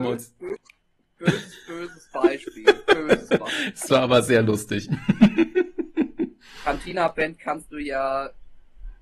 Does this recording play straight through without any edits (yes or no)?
yes